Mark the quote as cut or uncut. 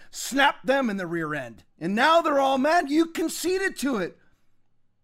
cut